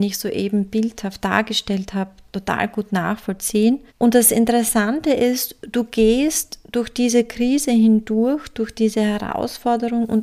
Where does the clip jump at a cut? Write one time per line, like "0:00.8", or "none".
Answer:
0:03.9